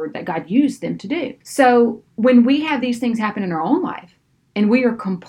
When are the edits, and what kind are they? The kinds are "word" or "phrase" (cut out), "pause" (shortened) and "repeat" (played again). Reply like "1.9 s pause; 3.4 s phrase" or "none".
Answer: 1.4 s pause